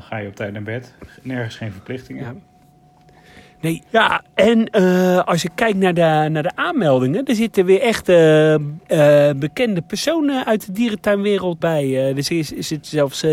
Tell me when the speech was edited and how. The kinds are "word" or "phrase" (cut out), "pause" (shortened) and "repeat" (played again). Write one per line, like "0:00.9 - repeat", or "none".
0:03.9 - pause
0:08.8 - pause
0:11.6 - word

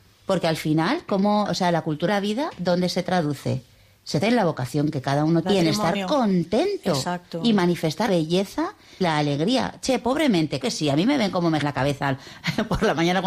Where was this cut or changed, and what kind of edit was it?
0:01.5 - word
0:02.1 - word
0:04.2 - word
0:05.4 - word
0:08.1 - word
0:09.0 - word
0:10.6 - word
0:11.6 - word

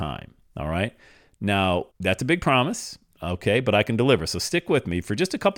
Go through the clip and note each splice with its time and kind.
0:01.9 - pause

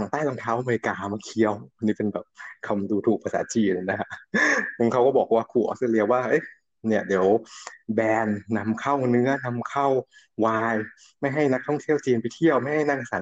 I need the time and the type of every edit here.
none

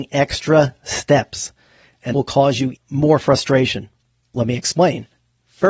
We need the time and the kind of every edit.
0:02.1 - word
0:02.7 - word

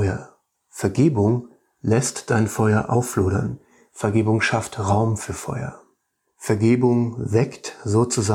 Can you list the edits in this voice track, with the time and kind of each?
none

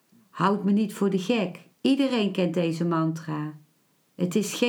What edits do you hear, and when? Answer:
0:01.7 - pause

